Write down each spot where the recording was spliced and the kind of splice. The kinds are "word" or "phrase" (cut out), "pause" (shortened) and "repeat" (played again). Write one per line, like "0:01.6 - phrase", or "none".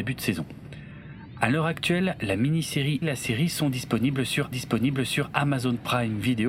0:03.0 - word
0:04.5 - repeat